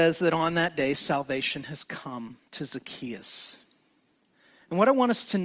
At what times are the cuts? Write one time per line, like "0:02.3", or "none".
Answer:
0:02.5